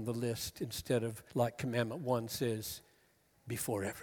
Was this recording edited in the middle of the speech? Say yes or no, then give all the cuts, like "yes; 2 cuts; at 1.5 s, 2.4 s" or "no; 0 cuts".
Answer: yes; 1 cut; at 1.3 s